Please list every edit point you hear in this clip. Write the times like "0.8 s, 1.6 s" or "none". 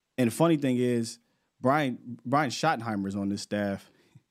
none